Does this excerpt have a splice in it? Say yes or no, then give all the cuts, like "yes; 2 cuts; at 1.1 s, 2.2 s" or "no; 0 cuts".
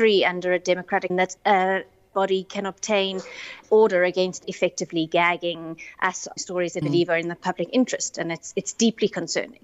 yes; 6 cuts; at 1.1 s, 2.1 s, 3.7 s, 4.4 s, 6.4 s, 6.8 s